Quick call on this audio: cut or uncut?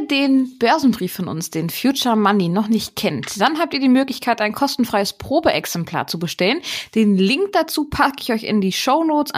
uncut